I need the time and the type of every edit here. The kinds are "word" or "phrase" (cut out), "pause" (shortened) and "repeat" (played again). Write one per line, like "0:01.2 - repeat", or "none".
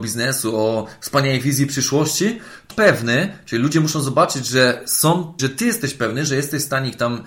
0:02.7 - word
0:05.4 - word